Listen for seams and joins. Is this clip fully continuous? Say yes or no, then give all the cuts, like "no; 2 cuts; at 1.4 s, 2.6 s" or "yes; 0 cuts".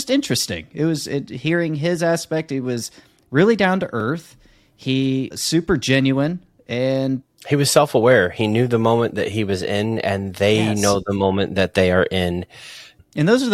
yes; 0 cuts